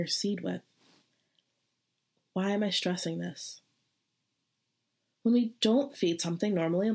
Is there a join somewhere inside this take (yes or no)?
no